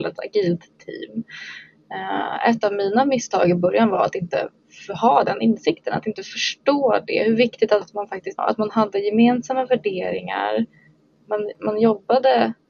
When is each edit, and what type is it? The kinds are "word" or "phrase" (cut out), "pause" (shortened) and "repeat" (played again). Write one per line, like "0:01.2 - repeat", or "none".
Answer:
0:07.8 - word
0:08.4 - phrase